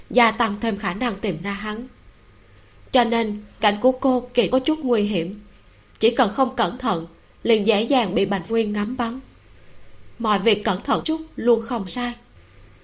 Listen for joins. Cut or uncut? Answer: cut